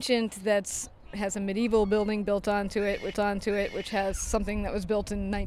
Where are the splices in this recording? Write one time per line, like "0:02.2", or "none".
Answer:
0:03.1